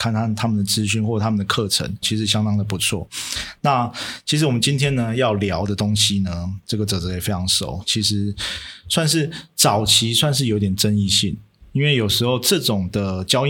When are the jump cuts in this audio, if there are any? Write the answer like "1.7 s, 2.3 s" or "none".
2.0 s, 6.6 s